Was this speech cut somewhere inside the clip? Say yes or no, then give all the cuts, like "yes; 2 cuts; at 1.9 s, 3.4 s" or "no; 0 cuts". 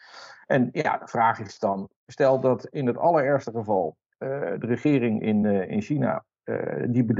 no; 0 cuts